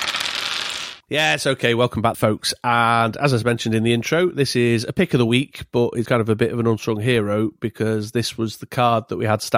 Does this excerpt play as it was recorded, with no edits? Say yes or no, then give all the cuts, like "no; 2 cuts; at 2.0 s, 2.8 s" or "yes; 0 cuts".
no; 3 cuts; at 1.0 s, 2.1 s, 6.1 s